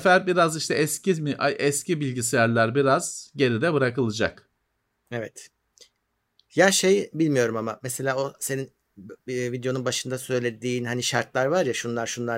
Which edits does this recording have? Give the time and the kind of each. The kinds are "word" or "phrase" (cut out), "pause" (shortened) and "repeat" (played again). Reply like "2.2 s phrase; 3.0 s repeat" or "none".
none